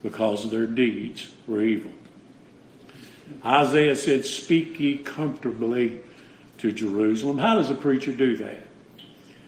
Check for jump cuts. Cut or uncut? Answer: uncut